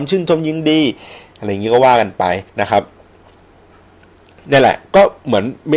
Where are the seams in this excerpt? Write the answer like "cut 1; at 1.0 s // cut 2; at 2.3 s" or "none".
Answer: cut 1; at 2.5 s